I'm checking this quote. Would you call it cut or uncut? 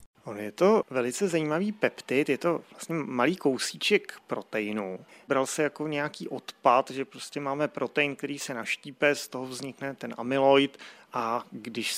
uncut